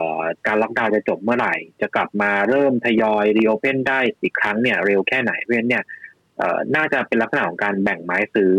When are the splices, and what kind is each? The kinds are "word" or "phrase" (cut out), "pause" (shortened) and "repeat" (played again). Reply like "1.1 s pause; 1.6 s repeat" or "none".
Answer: 4.2 s pause